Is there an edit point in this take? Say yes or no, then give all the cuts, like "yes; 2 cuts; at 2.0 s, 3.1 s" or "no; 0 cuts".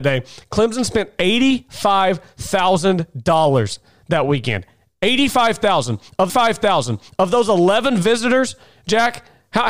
yes; 1 cut; at 6.3 s